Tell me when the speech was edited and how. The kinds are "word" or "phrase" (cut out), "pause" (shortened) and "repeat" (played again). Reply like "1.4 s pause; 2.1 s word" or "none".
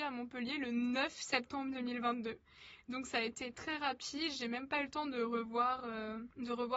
3.5 s word